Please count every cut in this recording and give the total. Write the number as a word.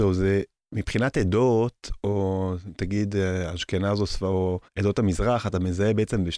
one